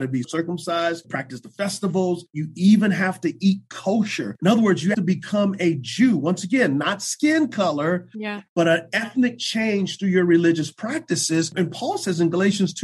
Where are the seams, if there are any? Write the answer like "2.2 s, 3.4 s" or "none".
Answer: 4.9 s